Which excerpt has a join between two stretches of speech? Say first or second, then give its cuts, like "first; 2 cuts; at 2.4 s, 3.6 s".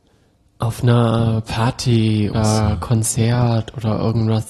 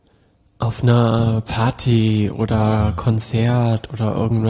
first; 1 cut; at 2.3 s